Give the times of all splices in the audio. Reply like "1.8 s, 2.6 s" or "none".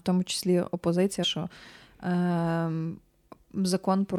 1.2 s

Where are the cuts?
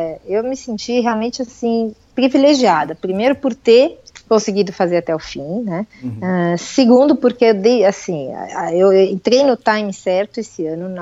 5.9 s

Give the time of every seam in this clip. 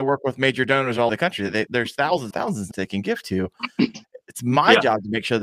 1.1 s, 1.7 s, 2.3 s, 2.7 s

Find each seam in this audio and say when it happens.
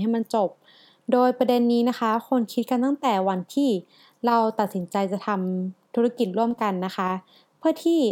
none

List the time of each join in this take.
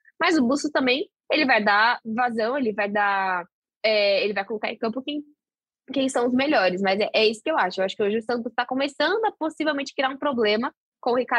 none

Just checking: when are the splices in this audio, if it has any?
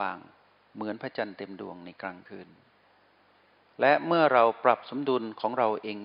none

